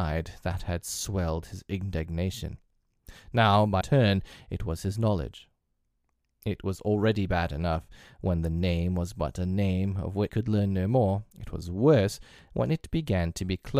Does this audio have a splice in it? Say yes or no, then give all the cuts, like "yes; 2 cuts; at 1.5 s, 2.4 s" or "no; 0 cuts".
yes; 3 cuts; at 3.8 s, 10.3 s, 11.3 s